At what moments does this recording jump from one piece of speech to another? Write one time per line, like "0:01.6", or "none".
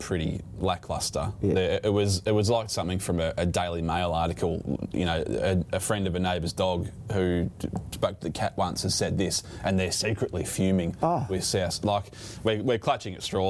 none